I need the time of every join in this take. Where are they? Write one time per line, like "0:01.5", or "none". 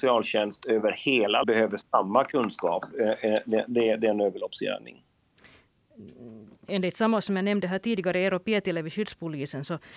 0:01.4
0:07.2